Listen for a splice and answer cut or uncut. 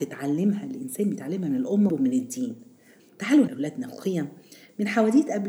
cut